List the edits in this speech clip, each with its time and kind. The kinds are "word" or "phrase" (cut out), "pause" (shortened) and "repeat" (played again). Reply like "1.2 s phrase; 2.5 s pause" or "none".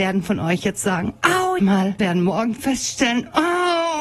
1.6 s phrase; 2.0 s word